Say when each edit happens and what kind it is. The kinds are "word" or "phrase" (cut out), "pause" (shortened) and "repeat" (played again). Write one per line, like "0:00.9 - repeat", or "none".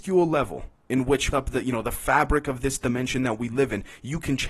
0:01.3 - word